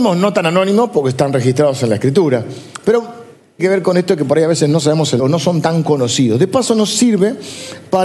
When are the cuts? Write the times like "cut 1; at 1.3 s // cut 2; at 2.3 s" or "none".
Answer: cut 1; at 3.6 s // cut 2; at 5.2 s